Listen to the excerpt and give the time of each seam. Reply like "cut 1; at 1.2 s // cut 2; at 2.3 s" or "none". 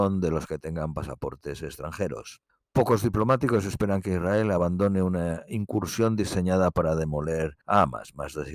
cut 1; at 2.5 s // cut 2; at 7.6 s